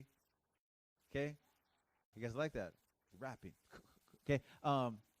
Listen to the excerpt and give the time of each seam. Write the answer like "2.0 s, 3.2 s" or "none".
2.1 s, 3.1 s